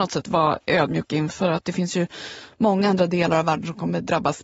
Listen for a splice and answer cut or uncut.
uncut